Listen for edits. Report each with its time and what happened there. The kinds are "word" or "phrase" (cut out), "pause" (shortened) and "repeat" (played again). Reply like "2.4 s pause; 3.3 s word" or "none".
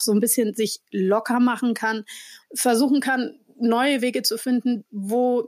2.4 s phrase